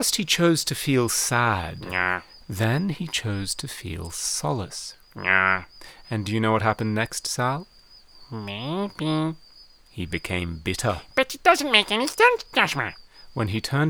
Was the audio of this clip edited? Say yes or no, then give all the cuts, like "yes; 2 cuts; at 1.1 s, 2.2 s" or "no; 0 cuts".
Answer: no; 0 cuts